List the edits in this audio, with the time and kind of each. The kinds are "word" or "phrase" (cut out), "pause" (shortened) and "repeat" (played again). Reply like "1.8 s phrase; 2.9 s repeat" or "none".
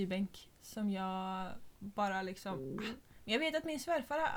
1.7 s pause